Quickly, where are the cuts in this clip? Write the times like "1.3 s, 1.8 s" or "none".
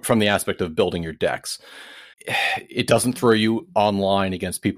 2.1 s